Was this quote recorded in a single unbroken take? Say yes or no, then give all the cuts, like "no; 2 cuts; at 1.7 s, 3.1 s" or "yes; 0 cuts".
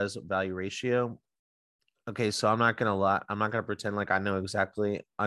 yes; 0 cuts